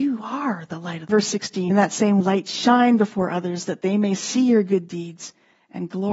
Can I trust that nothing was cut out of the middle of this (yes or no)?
no